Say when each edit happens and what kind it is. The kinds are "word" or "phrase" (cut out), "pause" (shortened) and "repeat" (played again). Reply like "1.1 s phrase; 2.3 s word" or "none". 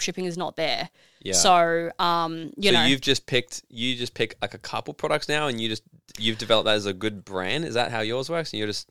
none